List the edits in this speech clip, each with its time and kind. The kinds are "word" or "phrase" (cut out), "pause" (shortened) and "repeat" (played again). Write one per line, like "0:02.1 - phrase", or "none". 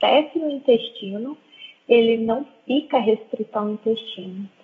none